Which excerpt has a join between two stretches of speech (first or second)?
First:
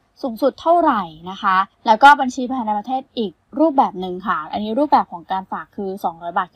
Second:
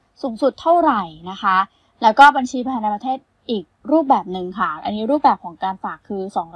first